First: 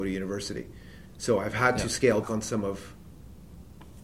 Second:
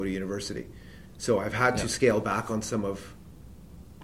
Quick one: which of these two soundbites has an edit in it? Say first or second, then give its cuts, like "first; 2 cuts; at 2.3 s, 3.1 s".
first; 1 cut; at 2.2 s